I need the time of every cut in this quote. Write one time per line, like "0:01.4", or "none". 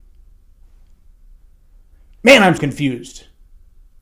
0:02.6